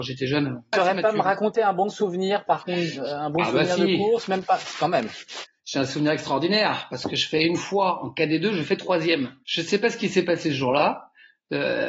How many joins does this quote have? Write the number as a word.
one